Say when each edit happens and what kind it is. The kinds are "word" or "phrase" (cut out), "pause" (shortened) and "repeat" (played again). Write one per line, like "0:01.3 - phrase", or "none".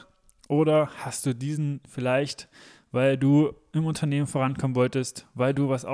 none